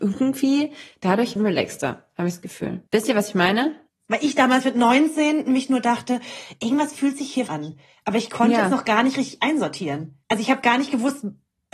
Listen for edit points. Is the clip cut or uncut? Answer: cut